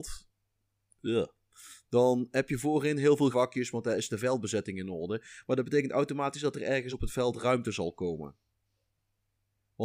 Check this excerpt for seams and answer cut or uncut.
cut